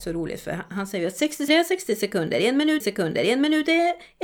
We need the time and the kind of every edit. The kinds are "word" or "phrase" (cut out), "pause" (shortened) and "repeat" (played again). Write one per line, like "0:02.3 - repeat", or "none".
0:01.5 - word
0:02.8 - repeat